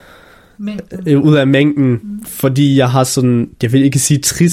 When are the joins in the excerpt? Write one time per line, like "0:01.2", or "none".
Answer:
0:03.5

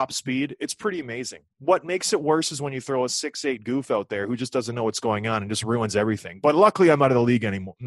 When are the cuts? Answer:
0:01.5

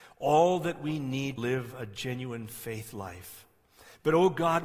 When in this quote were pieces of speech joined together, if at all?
0:01.4

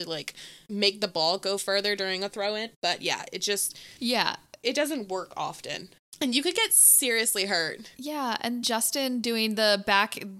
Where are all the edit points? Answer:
0:07.9
0:08.6

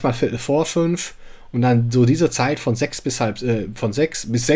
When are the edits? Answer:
none

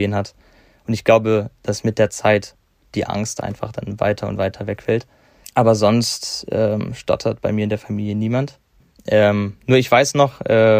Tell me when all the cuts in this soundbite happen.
none

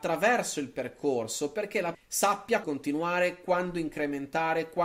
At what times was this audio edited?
0:01.9
0:02.6

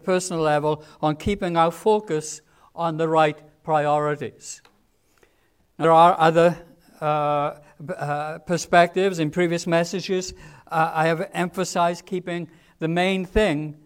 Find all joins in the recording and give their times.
0:05.8

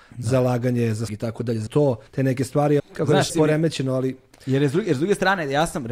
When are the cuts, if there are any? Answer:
0:01.1
0:01.7
0:02.1
0:02.8
0:03.3

